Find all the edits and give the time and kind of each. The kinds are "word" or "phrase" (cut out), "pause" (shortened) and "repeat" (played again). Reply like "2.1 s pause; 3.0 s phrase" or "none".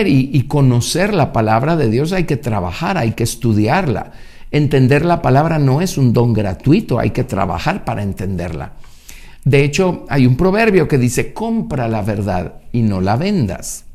none